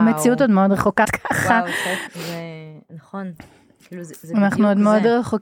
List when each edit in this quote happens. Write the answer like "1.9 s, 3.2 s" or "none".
1.0 s, 2.1 s